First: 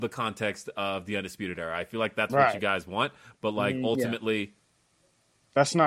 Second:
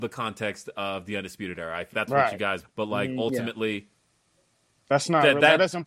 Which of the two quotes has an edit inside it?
second; 2 cuts; at 1.9 s, 2.6 s

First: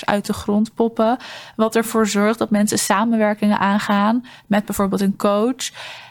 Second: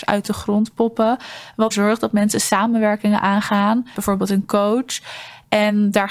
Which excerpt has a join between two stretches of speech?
second; 2 cuts; at 1.7 s, 3.9 s

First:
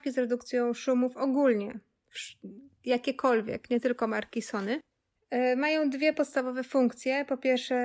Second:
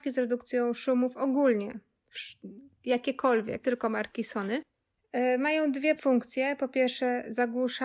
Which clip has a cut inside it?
second; 2 cuts; at 3.6 s, 6.0 s

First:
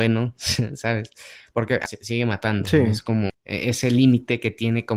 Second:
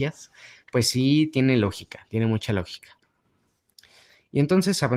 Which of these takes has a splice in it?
first; 2 cuts; at 1.9 s, 3.3 s

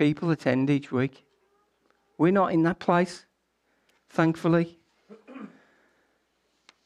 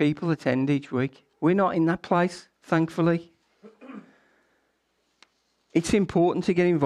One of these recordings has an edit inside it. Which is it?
second; 2 cuts; at 1.3 s, 2.5 s

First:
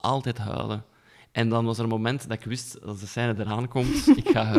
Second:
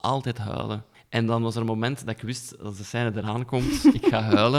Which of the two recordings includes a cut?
second; 1 cut; at 0.9 s

